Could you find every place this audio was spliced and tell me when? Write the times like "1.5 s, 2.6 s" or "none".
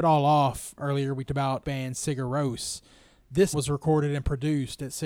1.3 s, 1.6 s, 3.5 s